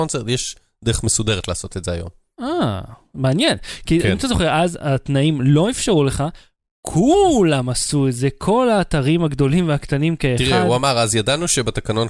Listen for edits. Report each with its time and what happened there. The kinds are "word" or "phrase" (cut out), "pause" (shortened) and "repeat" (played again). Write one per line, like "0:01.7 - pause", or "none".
none